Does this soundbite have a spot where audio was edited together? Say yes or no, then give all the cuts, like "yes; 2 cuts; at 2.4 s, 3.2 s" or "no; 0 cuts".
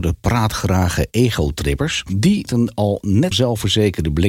yes; 2 cuts; at 2.5 s, 3.3 s